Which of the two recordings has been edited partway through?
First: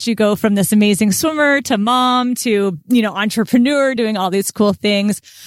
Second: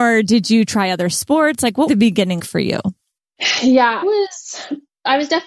second; 3 cuts; at 1.9 s, 2.4 s, 4.0 s

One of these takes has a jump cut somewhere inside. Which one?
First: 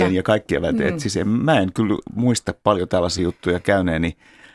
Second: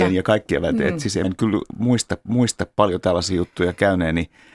second; 2 cuts; at 1.2 s, 2.2 s

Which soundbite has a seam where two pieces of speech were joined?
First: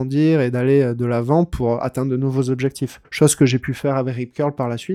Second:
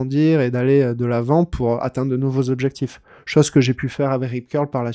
first; 1 cut; at 3.0 s

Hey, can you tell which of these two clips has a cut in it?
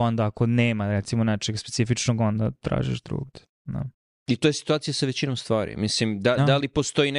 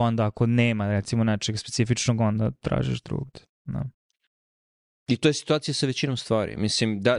first; 1 cut; at 4.0 s

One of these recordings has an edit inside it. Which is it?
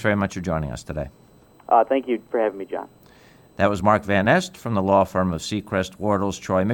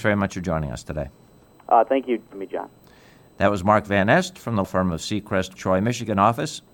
second; 3 cuts; at 2.3 s, 4.6 s, 5.6 s

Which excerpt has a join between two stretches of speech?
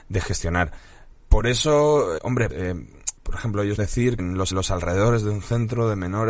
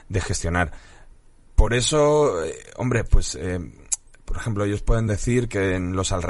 first; 7 cuts; at 1.2 s, 2.2 s, 2.5 s, 3.2 s, 3.8 s, 4.2 s, 4.5 s

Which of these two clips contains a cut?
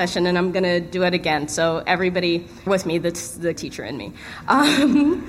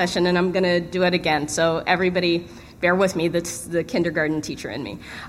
first; 2 cuts; at 2.7 s, 3.6 s

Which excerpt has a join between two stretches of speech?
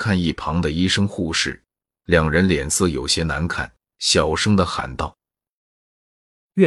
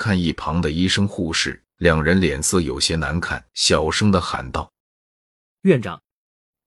second; 3 cuts; at 1.7 s, 3.5 s, 4.8 s

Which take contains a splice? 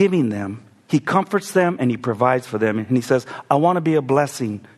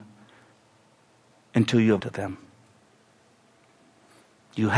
second; 1 cut; at 2.0 s

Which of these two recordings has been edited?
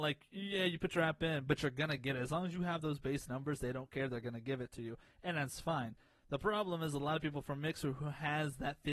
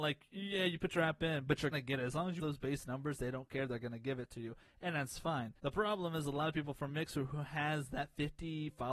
second; 3 cuts; at 1.7 s, 2.4 s, 5.6 s

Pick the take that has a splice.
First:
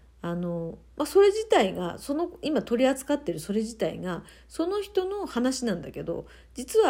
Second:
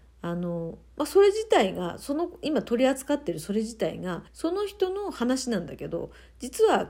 second; 1 cut; at 4.3 s

